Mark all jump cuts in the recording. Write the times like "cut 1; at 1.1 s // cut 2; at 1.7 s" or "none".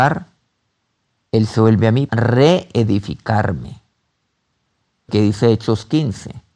cut 1; at 2.1 s // cut 2; at 5.1 s